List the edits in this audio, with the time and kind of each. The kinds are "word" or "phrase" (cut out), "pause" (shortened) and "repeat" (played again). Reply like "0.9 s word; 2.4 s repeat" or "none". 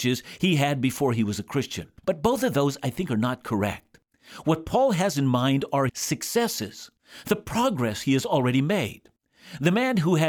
2.0 s pause; 5.9 s word